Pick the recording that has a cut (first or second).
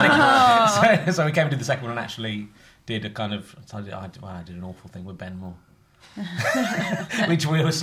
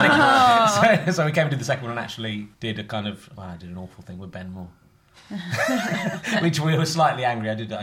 second